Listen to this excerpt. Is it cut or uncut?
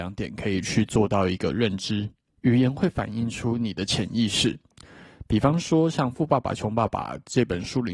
cut